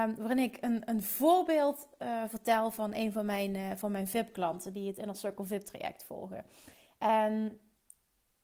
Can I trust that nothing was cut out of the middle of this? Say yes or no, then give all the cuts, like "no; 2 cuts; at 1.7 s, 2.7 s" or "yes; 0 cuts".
yes; 0 cuts